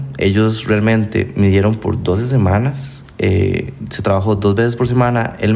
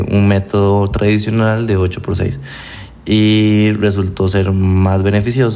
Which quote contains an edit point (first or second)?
first